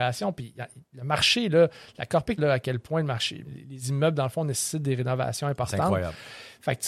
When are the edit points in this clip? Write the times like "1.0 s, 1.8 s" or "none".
2.4 s, 3.4 s